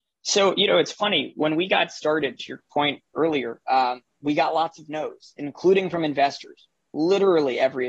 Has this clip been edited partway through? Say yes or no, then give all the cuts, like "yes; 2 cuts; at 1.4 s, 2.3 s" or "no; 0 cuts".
no; 0 cuts